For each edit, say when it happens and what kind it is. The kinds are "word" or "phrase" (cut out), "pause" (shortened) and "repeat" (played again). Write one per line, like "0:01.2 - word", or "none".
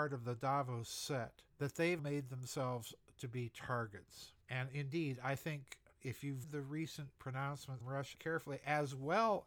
0:01.5 - pause
0:02.0 - word
0:04.4 - pause
0:06.4 - word
0:07.8 - word
0:08.1 - word

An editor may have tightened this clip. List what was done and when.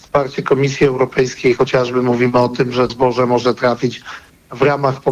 0:02.9 - word

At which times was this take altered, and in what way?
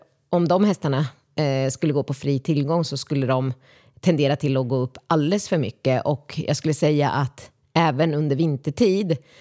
none

